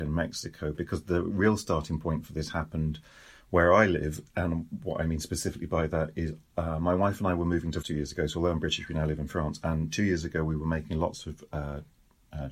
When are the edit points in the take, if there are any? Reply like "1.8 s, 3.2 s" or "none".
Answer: 7.8 s